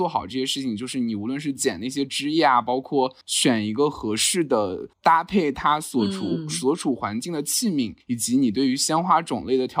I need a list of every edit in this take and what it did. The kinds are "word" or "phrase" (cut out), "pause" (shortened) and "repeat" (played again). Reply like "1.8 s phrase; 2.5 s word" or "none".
3.2 s pause; 4.9 s pause; 8.0 s pause